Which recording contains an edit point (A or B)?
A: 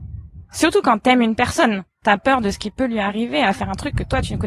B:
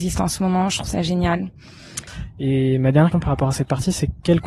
B